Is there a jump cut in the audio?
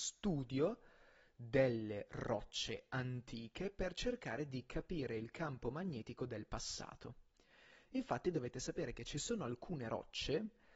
no; 0 cuts

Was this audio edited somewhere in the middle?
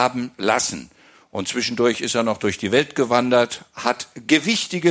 no; 0 cuts

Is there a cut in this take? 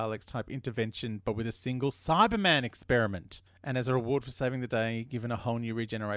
no; 0 cuts

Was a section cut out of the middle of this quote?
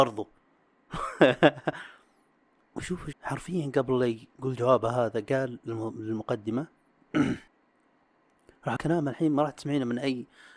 yes; 3 cuts; at 3.1 s, 7.5 s, 8.8 s

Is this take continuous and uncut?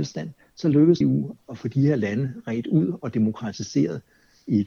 no; 1 cut; at 1.0 s

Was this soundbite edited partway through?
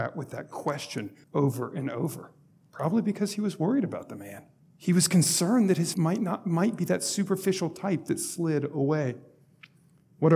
yes; 4 cuts; at 1.2 s, 2.5 s, 4.6 s, 5.9 s

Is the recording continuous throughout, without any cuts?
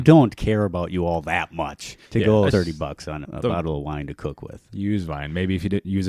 no; 3 cuts; at 2.1 s, 2.5 s, 3.2 s

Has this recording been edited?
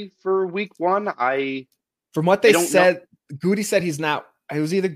no; 0 cuts

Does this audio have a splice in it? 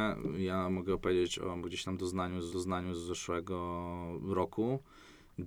yes; 1 cut; at 2.5 s

